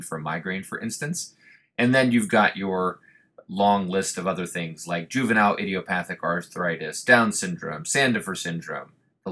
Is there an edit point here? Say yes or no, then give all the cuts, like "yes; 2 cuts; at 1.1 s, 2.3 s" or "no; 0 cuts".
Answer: no; 0 cuts